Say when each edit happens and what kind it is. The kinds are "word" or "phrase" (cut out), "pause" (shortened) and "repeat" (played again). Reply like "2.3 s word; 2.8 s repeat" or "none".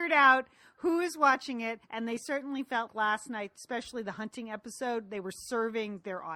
1.8 s pause; 2.9 s word